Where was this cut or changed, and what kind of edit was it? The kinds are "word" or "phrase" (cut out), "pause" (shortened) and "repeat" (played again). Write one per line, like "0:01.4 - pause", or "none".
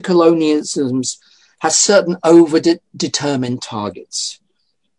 none